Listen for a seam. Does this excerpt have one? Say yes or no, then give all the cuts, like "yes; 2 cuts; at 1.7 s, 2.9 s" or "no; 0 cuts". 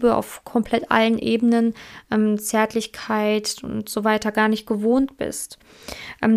no; 0 cuts